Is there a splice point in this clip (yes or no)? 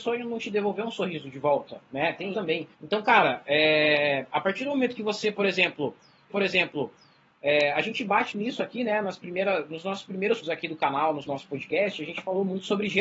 yes